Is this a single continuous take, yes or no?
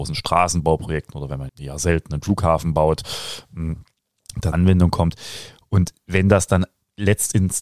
no